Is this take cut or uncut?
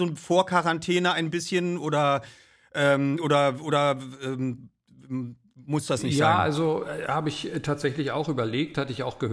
uncut